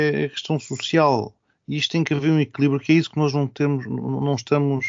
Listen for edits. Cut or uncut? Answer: uncut